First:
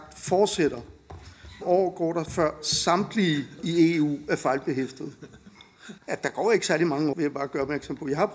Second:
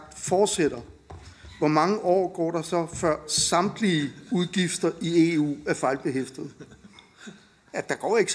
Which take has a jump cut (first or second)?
first